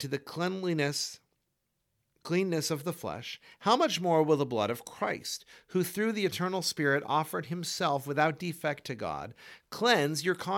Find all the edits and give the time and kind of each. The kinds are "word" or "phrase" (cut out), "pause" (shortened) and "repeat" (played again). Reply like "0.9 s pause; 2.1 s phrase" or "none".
none